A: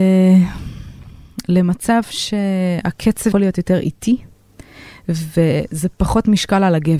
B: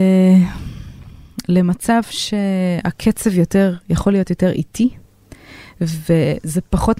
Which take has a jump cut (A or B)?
A